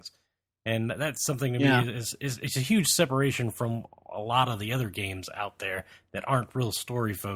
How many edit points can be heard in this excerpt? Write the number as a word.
zero